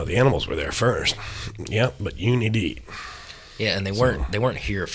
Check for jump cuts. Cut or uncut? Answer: uncut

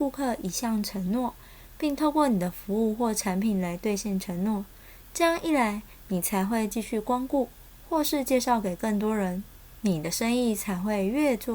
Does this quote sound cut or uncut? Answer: uncut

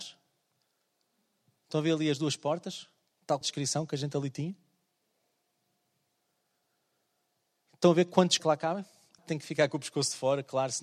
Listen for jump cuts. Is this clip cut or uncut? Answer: cut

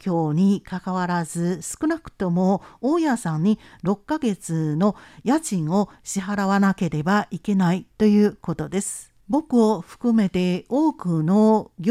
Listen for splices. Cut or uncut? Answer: cut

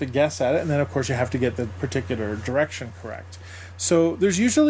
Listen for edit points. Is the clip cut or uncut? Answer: uncut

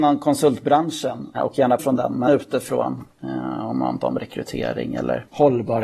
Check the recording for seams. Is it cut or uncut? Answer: cut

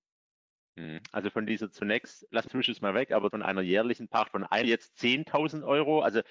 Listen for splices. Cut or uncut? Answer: cut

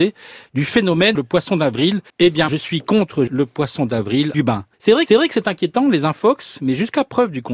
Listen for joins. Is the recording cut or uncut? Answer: cut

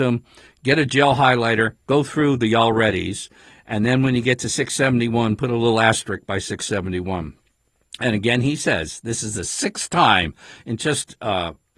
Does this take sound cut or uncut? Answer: uncut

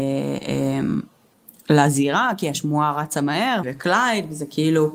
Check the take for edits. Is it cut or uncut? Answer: cut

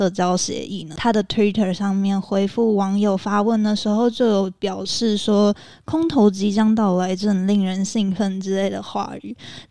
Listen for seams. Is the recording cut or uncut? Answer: uncut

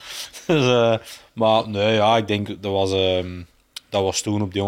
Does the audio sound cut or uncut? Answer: uncut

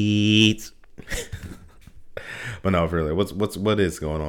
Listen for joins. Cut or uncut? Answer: uncut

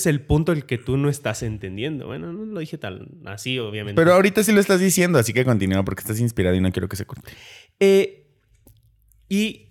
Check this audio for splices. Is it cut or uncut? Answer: uncut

